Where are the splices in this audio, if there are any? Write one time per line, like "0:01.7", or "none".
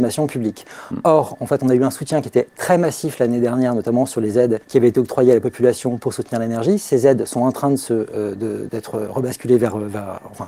0:04.6
0:08.7